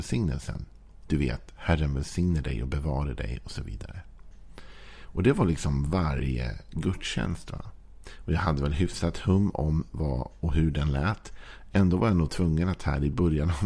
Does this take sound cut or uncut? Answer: uncut